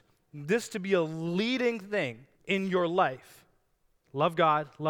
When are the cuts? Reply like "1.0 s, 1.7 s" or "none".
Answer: 2.3 s